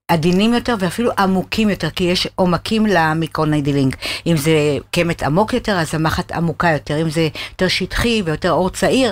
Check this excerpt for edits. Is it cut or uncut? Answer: uncut